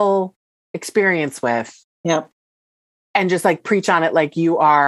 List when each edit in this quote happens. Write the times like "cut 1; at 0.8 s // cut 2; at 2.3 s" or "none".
cut 1; at 1.9 s